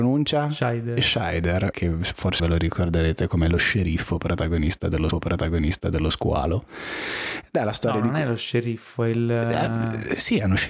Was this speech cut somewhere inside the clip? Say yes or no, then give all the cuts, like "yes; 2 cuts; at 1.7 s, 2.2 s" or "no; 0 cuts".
yes; 3 cuts; at 1.7 s, 2.4 s, 5.1 s